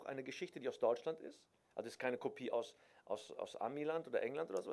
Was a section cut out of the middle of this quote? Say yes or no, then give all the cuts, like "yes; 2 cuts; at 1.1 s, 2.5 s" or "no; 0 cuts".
no; 0 cuts